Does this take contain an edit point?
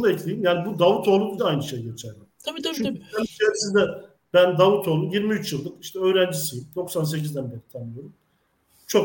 yes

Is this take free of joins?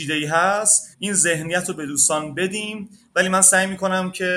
no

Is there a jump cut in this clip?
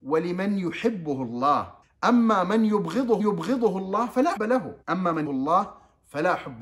yes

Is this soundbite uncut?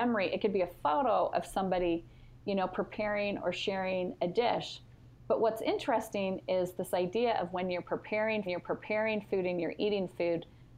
no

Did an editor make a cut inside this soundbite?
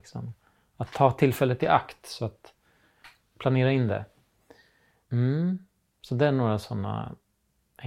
no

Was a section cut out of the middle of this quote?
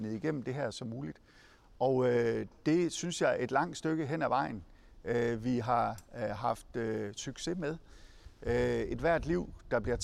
no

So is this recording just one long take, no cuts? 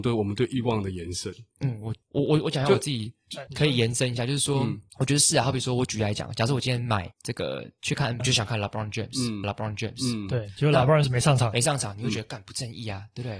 no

